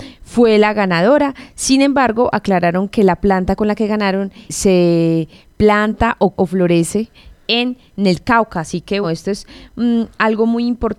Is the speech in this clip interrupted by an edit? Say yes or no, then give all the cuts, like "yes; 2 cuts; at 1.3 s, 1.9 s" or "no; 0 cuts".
yes; 3 cuts; at 4.5 s, 6.3 s, 9.0 s